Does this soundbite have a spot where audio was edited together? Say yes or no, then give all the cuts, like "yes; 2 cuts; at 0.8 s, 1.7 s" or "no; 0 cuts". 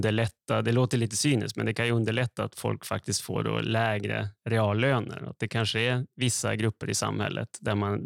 no; 0 cuts